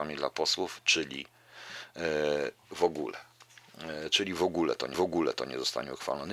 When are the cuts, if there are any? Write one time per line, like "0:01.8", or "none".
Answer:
0:04.9

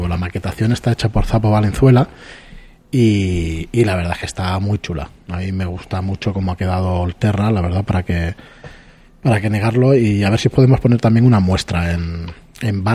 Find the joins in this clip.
none

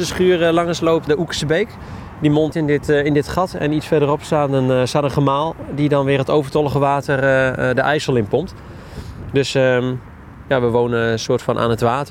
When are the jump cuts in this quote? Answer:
0:01.1
0:02.5

